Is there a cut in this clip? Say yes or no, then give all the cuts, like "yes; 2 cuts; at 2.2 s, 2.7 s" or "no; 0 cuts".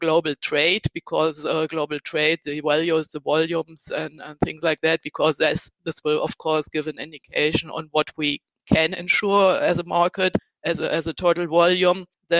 no; 0 cuts